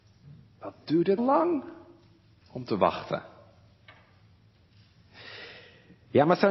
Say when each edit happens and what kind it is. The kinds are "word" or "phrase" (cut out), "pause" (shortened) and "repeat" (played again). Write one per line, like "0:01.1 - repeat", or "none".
0:01.2 - word

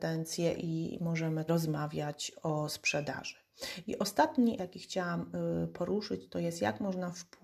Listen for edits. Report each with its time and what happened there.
0:01.5 - word
0:04.6 - word

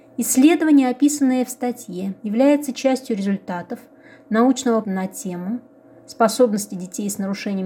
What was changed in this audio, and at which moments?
0:02.2 - pause
0:04.8 - word

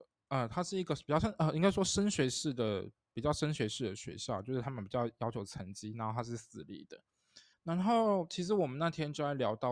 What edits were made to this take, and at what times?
0:07.5 - pause

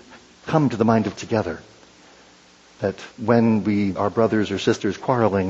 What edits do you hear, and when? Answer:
0:01.2 - word
0:03.1 - pause
0:04.0 - word

